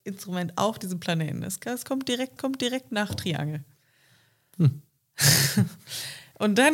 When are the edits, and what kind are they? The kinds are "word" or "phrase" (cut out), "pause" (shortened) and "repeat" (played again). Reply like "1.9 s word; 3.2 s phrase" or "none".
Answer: 2.4 s repeat